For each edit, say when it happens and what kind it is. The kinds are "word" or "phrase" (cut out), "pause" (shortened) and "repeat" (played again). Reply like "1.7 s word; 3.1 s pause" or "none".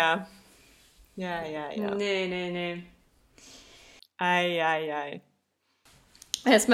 none